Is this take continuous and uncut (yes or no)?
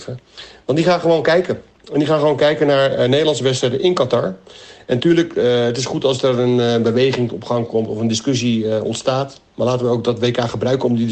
yes